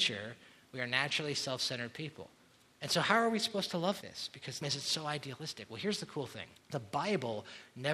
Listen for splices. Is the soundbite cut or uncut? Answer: cut